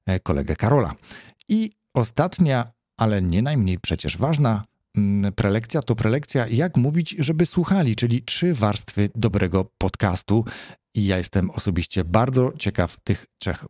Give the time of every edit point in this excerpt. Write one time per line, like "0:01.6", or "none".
none